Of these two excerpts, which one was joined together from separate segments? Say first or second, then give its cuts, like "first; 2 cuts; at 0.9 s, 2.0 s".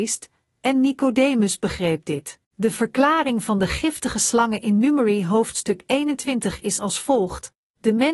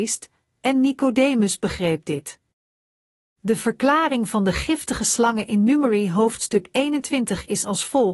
first; 1 cut; at 2.4 s